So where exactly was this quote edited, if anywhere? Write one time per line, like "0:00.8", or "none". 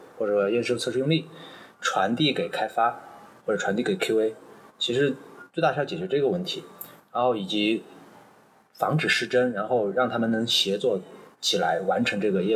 none